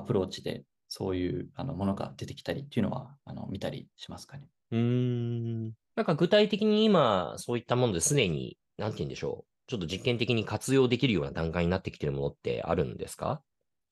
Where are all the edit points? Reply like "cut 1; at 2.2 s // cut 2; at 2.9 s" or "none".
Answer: cut 1; at 5.8 s

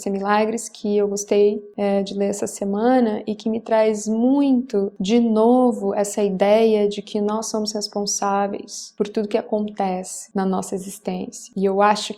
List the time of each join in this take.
none

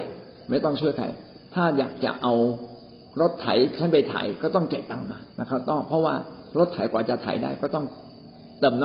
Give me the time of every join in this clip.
cut 1; at 5.3 s

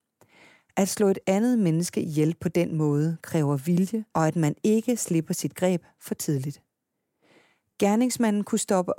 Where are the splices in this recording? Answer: cut 1; at 4.1 s

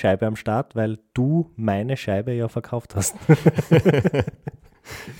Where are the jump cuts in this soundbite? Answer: none

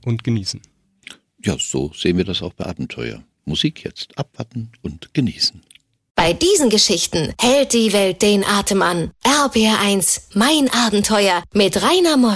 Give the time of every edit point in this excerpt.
cut 1; at 2.6 s

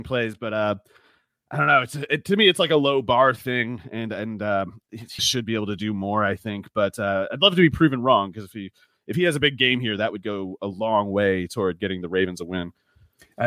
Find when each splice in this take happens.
cut 1; at 5.2 s

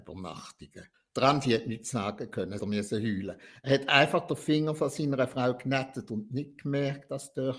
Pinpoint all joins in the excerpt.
cut 1; at 0.9 s // cut 2; at 2.6 s

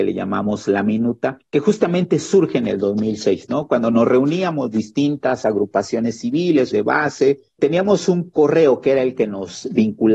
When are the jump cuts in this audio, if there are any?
cut 1; at 1.5 s // cut 2; at 6.7 s // cut 3; at 7.6 s

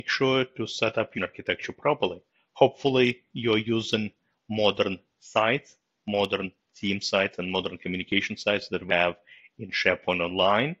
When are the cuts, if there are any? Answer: cut 1; at 1.1 s // cut 2; at 8.9 s

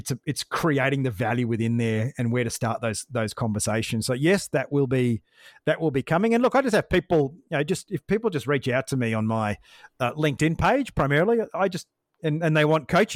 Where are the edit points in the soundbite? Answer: none

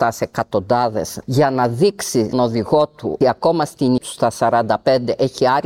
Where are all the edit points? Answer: cut 1; at 1.2 s // cut 2; at 2.3 s // cut 3; at 3.2 s // cut 4; at 4.0 s

